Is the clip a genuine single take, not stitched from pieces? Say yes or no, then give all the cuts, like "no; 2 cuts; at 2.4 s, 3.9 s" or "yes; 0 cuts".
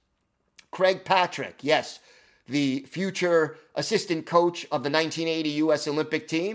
yes; 0 cuts